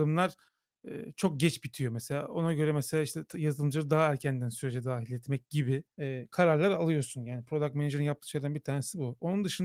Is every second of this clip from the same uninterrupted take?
no; 1 cut; at 5.9 s

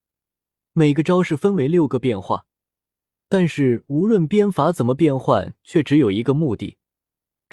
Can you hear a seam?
no; 0 cuts

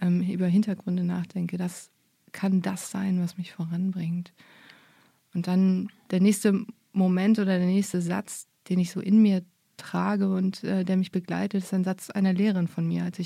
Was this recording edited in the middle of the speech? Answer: no; 0 cuts

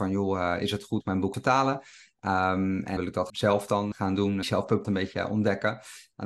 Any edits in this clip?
yes; 7 cuts; at 1.0 s, 1.3 s, 3.0 s, 3.3 s, 3.9 s, 4.4 s, 4.8 s

